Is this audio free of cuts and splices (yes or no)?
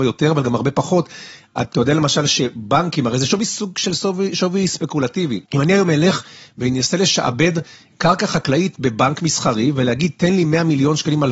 no